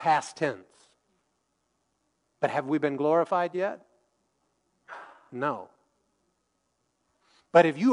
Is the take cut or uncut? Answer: uncut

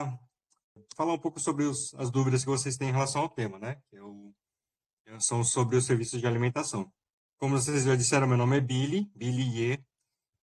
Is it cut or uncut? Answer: uncut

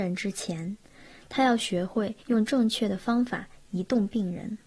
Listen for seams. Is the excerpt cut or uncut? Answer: cut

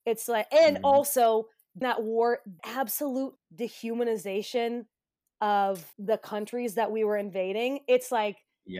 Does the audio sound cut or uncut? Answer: cut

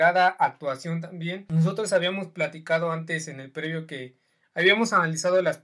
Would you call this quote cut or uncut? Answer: uncut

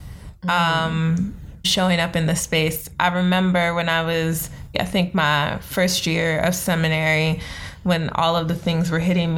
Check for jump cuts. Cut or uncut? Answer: cut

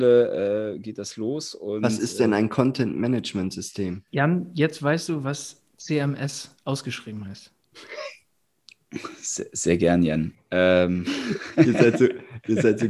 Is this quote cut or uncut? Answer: cut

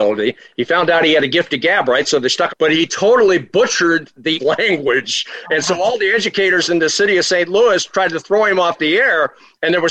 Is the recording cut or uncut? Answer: cut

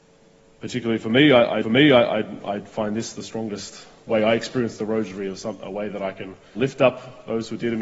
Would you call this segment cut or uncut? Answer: cut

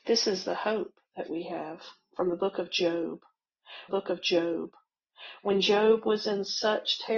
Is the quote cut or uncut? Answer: cut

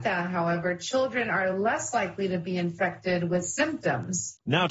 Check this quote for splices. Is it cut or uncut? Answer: uncut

